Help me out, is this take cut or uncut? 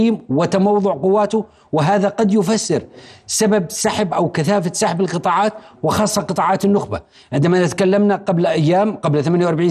uncut